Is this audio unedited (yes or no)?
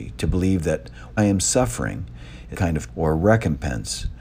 no